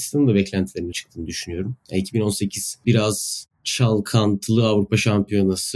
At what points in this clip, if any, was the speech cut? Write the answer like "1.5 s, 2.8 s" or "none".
0.9 s, 2.8 s